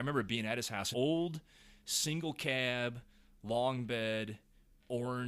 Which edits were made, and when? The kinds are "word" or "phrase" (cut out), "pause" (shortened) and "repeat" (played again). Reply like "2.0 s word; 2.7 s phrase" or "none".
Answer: 0.9 s phrase